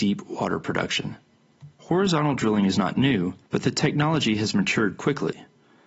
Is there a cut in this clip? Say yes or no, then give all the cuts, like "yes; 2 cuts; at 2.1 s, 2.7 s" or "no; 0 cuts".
yes; 2 cuts; at 1.8 s, 3.5 s